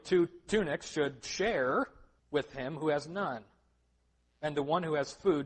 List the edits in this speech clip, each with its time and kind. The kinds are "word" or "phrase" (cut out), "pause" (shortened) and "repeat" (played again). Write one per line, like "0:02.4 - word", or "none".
0:02.2 - pause

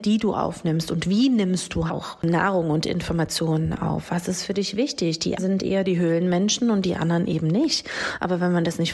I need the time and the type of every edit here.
0:01.9 - word
0:05.4 - word

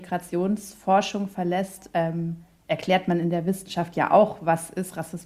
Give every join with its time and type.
none

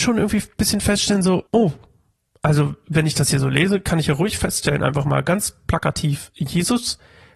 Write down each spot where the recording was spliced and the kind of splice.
0:01.5 - pause

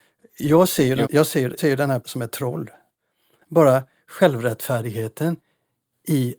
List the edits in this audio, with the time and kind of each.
0:01.0 - word
0:01.6 - word
0:02.0 - word

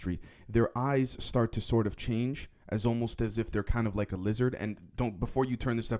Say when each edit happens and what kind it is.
none

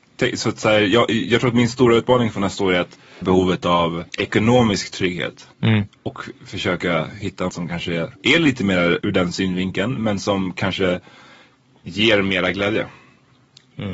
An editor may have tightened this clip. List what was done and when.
0:03.2 - phrase
0:04.1 - pause
0:05.5 - pause
0:07.5 - phrase
0:08.2 - pause
0:09.0 - word

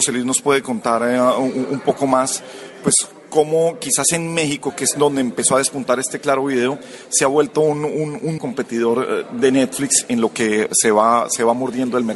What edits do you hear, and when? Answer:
0:08.4 - word

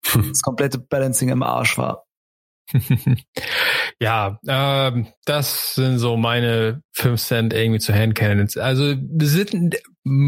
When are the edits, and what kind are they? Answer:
0:05.2 - pause

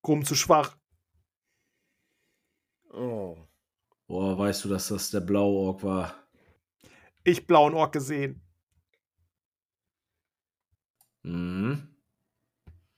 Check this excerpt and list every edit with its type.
none

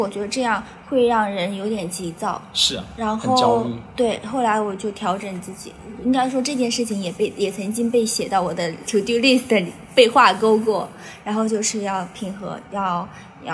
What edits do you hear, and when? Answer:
0:08.8 - word

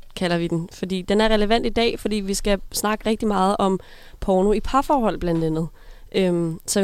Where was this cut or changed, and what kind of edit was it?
none

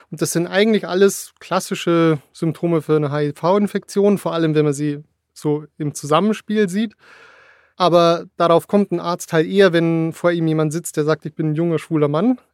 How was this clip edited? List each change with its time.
none

